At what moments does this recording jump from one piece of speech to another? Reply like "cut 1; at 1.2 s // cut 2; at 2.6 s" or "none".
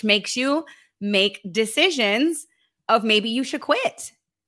none